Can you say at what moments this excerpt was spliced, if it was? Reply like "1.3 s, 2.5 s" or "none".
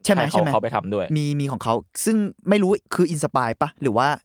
2.4 s, 2.9 s